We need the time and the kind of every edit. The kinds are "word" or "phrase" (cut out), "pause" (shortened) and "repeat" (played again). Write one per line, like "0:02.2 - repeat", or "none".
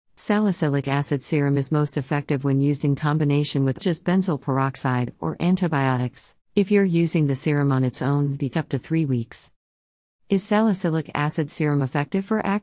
0:03.8 - phrase
0:06.4 - pause
0:08.5 - phrase